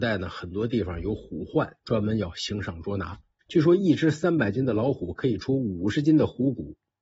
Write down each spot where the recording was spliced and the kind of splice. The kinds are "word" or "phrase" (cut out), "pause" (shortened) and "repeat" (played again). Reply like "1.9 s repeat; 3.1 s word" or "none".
1.8 s pause; 3.4 s pause